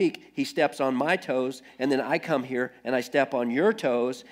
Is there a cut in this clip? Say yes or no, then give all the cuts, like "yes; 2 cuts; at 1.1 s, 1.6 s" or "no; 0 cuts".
no; 0 cuts